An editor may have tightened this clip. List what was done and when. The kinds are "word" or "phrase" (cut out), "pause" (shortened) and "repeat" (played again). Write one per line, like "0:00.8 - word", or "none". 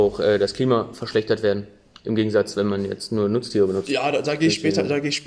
none